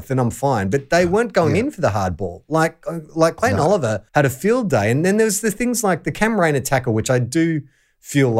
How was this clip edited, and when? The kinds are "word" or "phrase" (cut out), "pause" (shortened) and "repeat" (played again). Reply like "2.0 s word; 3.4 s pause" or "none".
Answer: 3.1 s pause; 4.1 s pause

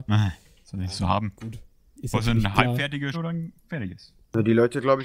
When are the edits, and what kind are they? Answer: 3.1 s word

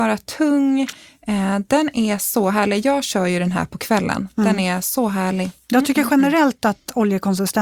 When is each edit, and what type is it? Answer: none

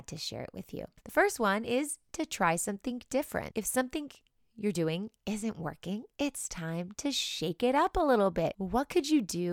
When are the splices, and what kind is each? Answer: none

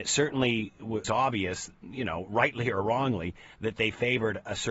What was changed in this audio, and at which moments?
1.0 s word

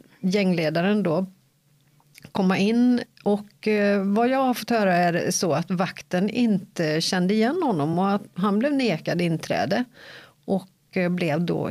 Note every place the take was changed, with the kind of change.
none

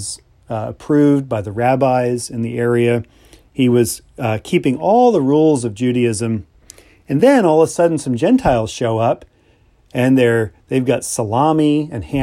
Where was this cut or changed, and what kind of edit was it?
none

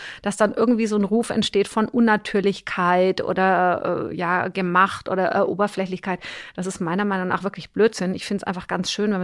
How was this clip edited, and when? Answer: none

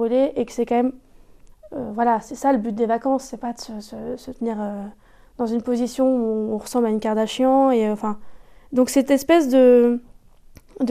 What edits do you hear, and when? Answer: 8.6 s pause

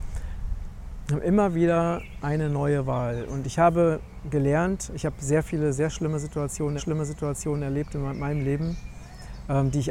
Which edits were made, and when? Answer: 6.8 s repeat

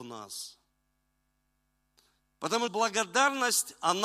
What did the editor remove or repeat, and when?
2.7 s word

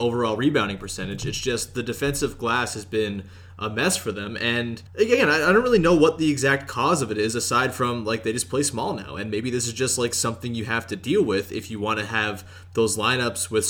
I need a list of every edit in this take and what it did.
4.9 s pause

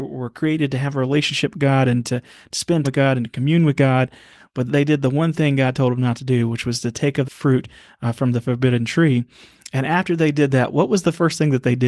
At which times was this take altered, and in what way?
2.8 s word; 4.7 s word; 7.2 s word

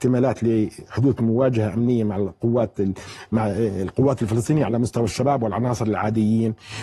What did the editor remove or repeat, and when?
none

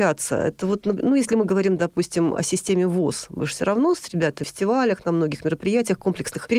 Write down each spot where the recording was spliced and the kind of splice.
4.4 s phrase

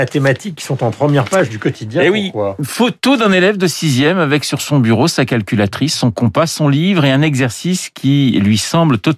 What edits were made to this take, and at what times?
none

